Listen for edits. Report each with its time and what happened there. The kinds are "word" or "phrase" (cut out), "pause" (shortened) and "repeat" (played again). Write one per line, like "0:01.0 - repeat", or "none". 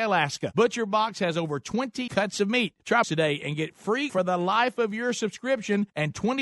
0:02.1 - word
0:03.0 - word
0:04.1 - phrase